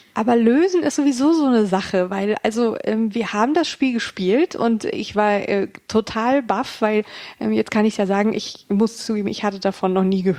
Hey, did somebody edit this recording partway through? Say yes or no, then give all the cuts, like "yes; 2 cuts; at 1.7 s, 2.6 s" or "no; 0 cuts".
no; 0 cuts